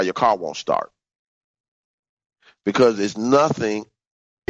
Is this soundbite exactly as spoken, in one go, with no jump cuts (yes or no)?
yes